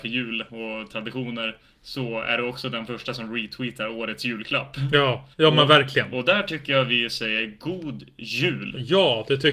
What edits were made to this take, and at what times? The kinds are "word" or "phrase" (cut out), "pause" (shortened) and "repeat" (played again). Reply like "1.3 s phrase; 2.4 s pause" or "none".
5.3 s pause

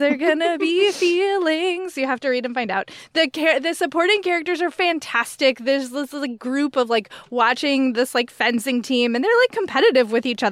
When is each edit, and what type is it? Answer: none

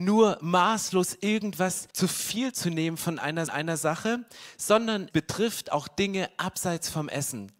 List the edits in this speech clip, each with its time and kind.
1.9 s pause; 3.5 s repeat; 5.1 s word

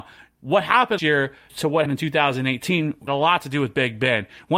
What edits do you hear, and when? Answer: 1.0 s word; 1.5 s word; 1.9 s word; 3.1 s word

